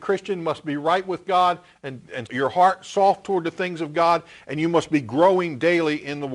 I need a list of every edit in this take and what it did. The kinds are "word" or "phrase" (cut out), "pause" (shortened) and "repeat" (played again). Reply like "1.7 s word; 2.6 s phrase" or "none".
2.3 s word